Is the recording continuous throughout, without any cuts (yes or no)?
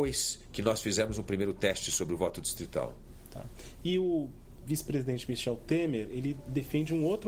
no